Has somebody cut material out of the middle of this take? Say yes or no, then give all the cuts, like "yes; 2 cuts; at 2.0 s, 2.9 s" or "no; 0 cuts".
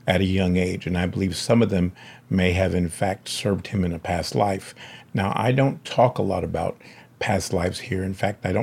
no; 0 cuts